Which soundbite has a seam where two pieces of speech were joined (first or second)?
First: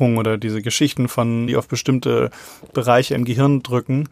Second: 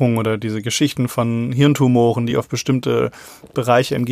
first